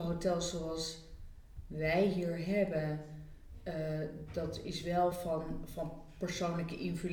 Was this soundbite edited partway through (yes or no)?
no